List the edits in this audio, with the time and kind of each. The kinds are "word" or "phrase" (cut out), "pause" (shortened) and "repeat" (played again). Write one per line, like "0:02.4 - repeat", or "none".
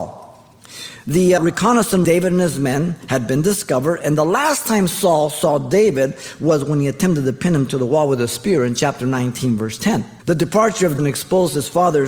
0:01.4 - word
0:02.0 - phrase
0:10.2 - pause
0:11.0 - phrase